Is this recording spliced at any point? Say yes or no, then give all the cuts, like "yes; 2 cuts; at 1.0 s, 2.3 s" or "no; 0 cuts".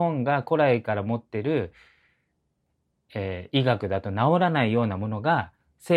no; 0 cuts